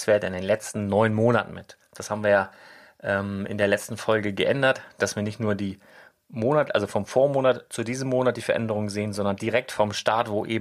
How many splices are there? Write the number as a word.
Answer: zero